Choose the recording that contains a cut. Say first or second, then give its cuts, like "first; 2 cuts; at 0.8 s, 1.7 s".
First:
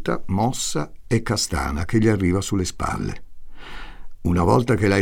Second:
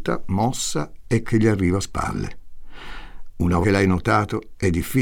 second; 3 cuts; at 1.2 s, 1.8 s, 3.6 s